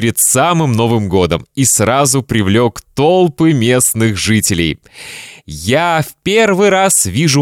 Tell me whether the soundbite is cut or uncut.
uncut